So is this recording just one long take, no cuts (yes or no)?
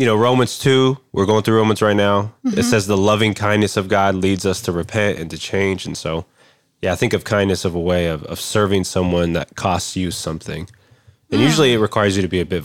yes